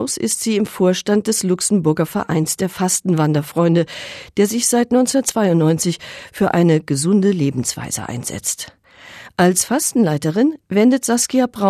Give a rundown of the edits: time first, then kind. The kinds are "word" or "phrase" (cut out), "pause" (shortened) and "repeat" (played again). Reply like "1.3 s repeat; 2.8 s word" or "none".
none